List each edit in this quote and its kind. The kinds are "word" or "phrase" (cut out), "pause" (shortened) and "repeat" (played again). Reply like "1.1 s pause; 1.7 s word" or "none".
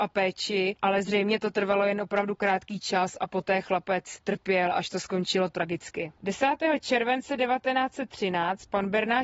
none